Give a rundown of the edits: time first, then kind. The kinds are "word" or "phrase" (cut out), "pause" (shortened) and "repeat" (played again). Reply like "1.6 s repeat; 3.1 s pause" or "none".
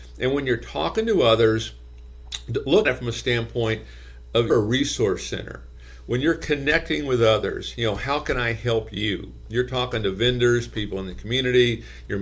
2.8 s word; 4.5 s word